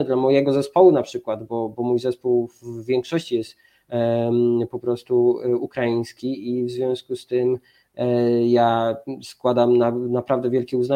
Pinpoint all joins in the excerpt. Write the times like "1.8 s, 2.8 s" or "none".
none